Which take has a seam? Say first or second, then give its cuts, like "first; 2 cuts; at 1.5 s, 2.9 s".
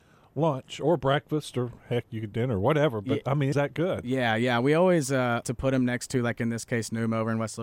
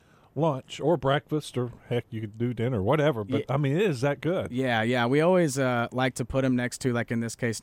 first; 3 cuts; at 2.3 s, 3.5 s, 5.4 s